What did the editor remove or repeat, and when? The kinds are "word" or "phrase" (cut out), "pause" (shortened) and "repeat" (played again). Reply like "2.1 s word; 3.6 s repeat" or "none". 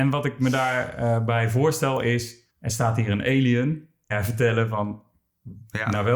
2.5 s pause; 4.1 s phrase